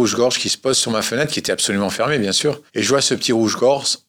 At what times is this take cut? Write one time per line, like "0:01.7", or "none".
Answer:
0:02.7